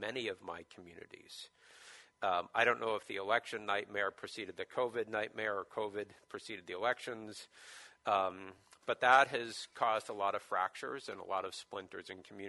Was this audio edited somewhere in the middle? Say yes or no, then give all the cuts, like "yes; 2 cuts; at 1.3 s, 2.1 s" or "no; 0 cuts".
no; 0 cuts